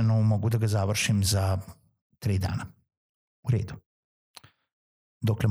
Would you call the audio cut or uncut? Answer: uncut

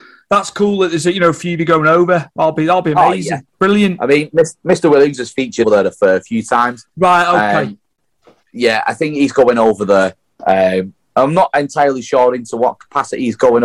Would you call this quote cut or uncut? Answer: cut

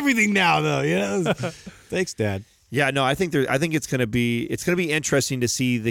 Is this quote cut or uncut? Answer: uncut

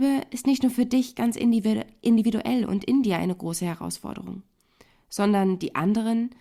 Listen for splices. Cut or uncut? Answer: uncut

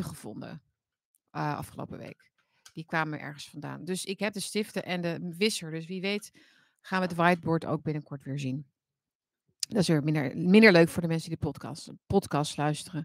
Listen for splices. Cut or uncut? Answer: uncut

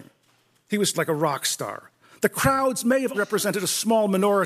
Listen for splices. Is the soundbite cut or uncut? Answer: cut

